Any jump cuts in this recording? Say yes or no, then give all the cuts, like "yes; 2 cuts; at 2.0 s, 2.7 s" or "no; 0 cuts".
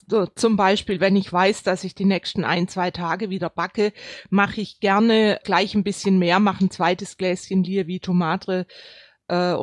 yes; 1 cut; at 5.4 s